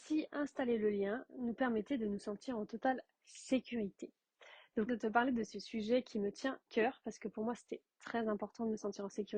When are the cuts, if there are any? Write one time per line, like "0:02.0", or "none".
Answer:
0:04.9
0:06.7